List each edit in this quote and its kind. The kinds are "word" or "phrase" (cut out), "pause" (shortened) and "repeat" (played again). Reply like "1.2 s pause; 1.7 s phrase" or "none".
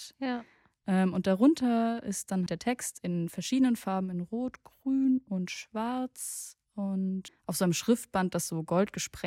2.5 s phrase